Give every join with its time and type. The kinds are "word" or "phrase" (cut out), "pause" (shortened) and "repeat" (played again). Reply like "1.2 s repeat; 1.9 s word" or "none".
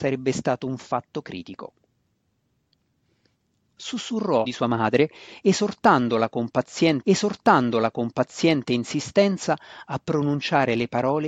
4.4 s word; 7.0 s repeat